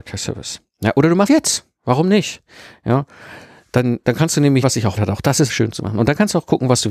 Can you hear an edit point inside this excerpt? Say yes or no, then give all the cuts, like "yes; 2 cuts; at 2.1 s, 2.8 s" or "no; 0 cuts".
yes; 4 cuts; at 1.3 s, 4.6 s, 5.0 s, 5.5 s